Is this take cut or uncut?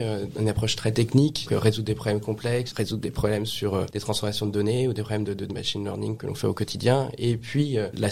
cut